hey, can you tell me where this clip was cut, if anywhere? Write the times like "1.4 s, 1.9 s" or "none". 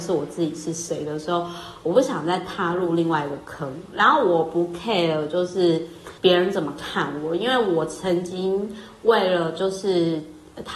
6.2 s

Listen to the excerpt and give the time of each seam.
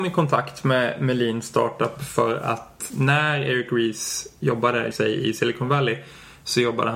2.9 s, 4.9 s

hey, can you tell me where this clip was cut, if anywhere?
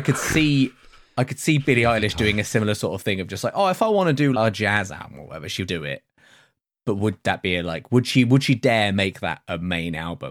4.3 s, 5.7 s

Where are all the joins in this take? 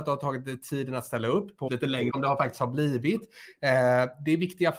1.7 s, 2.1 s

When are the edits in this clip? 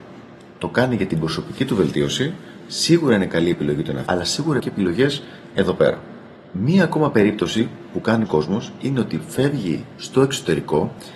4.1 s, 4.6 s, 8.3 s

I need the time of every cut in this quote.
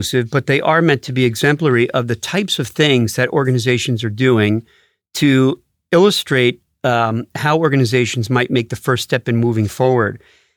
none

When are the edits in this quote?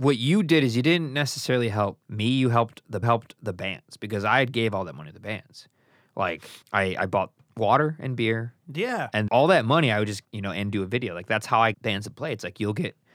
2.0 s, 3.0 s, 6.6 s, 9.3 s, 10.2 s, 11.7 s

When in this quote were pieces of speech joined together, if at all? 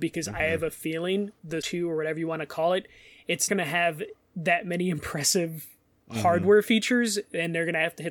1.6 s, 3.5 s

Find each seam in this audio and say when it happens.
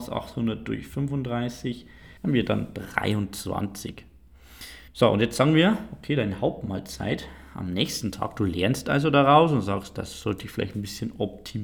2.2 s, 4.9 s

